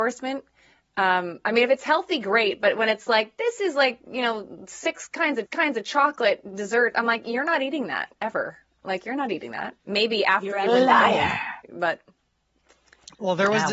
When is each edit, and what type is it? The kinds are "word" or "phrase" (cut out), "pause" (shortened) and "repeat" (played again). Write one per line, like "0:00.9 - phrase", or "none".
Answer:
0:05.5 - repeat
0:11.6 - pause